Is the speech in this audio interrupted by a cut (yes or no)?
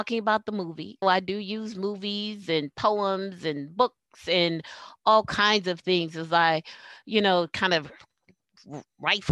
yes